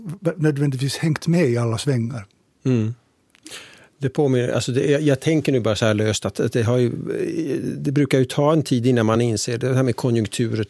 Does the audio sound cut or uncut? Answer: uncut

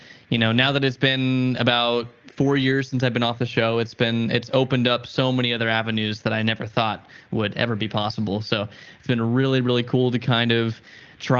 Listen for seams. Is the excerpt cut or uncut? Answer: uncut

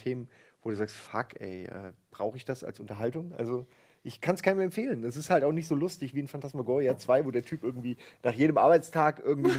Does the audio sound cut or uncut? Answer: uncut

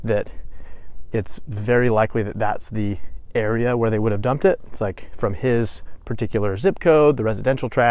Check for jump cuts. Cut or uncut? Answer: uncut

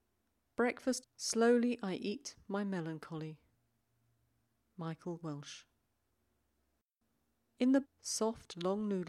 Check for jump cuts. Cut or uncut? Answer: cut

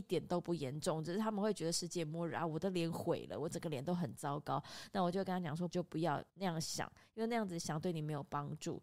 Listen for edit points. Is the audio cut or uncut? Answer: cut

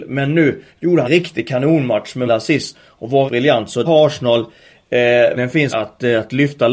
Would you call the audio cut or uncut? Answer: cut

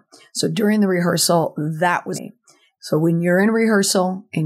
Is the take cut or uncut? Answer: cut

